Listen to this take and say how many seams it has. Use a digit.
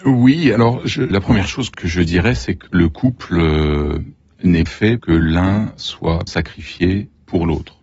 6